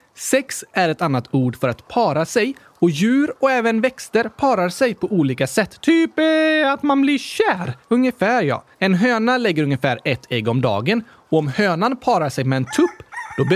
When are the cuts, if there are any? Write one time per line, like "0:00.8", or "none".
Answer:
0:07.8
0:08.7